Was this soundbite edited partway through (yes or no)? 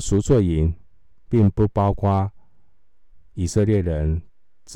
yes